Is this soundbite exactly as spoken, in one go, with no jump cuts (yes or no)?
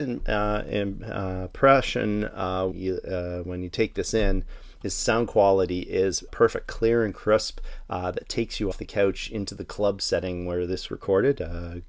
no